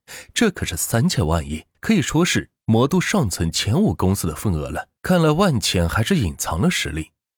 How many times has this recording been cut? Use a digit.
2